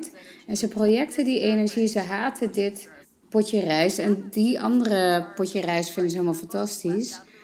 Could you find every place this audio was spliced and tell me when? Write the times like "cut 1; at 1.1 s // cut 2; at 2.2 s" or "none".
cut 1; at 3.0 s